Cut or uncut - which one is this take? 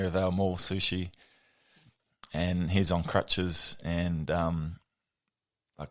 uncut